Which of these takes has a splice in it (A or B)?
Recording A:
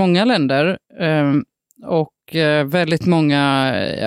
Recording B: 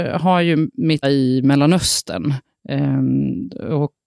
B